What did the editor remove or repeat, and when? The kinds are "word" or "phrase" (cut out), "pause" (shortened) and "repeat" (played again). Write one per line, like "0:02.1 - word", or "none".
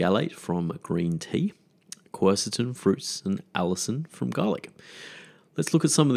0:02.8 - word